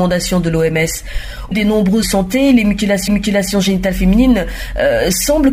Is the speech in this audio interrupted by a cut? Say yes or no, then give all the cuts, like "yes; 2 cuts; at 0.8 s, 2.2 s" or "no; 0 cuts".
yes; 3 cuts; at 1.5 s, 2.0 s, 3.1 s